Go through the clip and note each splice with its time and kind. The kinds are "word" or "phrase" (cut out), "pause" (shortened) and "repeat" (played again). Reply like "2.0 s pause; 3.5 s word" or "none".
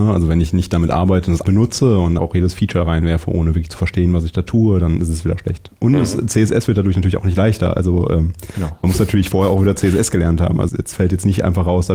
1.4 s word; 2.2 s word; 10.7 s word